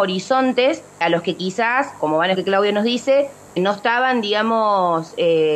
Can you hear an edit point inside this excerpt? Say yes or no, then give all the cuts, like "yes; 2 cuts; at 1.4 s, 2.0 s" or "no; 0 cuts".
yes; 4 cuts; at 1.0 s, 2.0 s, 2.3 s, 3.6 s